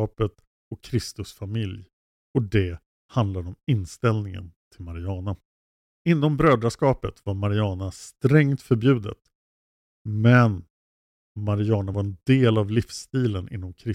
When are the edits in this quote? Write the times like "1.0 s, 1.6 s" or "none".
none